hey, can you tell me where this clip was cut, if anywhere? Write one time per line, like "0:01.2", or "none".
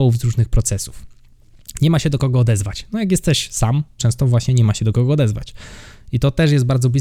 0:04.0